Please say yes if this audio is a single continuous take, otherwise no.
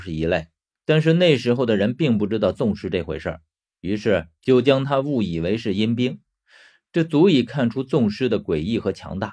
yes